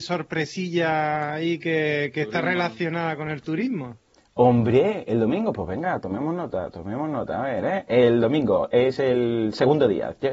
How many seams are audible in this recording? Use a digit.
0